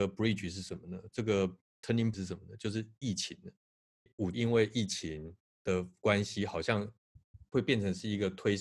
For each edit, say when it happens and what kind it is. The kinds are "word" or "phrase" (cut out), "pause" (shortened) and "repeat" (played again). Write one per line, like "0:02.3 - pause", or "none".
0:02.1 - word
0:04.3 - word